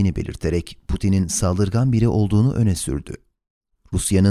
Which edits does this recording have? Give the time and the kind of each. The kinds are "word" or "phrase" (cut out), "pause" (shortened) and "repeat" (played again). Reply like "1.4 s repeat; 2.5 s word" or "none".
none